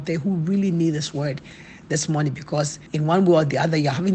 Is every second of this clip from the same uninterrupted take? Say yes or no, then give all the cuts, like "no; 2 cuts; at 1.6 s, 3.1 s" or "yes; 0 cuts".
no; 1 cut; at 2.9 s